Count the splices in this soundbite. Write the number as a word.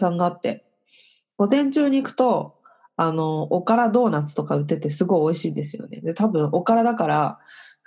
zero